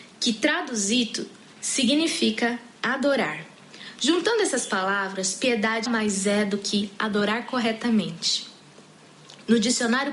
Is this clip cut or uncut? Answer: cut